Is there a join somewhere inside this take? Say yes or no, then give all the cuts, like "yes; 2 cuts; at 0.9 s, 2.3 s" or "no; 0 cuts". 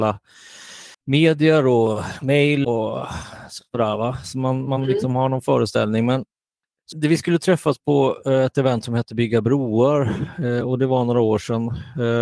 yes; 3 cuts; at 0.9 s, 2.6 s, 6.9 s